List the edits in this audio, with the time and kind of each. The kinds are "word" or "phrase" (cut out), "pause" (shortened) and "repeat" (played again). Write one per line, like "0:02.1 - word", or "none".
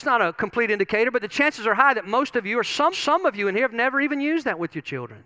0:02.9 - repeat

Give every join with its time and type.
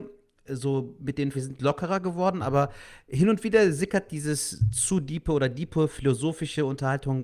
0:01.3 - word

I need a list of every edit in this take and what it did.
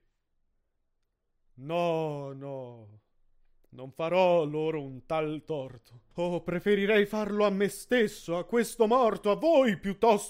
0:06.1 - pause

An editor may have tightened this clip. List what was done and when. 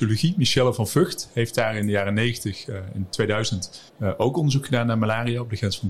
0:03.9 - pause

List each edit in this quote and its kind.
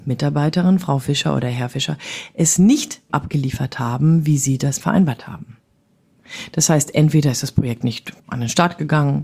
0:03.1 - word
0:04.8 - word
0:08.2 - pause

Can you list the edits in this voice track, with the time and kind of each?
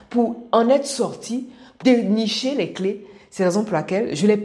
0:01.8 - word

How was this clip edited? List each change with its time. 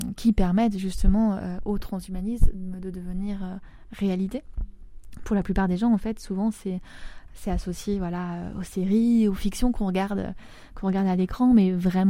none

